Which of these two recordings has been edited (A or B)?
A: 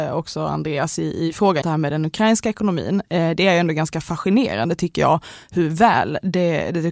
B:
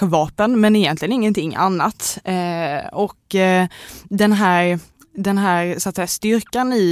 A